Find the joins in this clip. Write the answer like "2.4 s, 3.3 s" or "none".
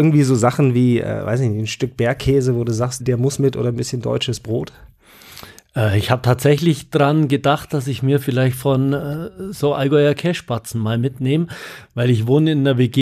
3.0 s